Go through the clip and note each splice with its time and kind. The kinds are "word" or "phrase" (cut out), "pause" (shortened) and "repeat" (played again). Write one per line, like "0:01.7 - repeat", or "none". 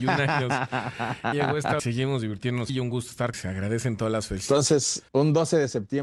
0:01.3 - word
0:01.8 - phrase
0:02.7 - word
0:03.3 - phrase
0:05.1 - pause